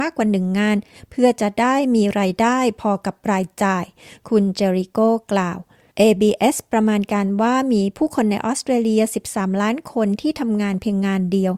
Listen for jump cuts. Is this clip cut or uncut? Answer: uncut